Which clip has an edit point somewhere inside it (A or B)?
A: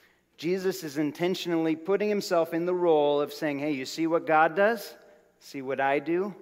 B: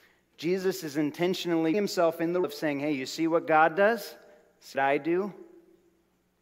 B